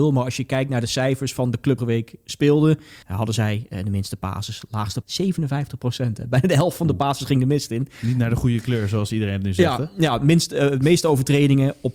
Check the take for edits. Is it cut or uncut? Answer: cut